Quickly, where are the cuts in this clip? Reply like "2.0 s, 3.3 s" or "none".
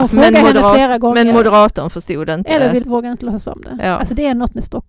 2.8 s